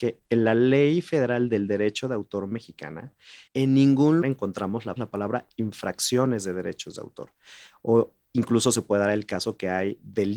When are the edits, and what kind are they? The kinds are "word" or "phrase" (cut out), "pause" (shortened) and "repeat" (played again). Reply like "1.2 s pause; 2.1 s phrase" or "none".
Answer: 3.5 s pause; 4.2 s word; 5.0 s phrase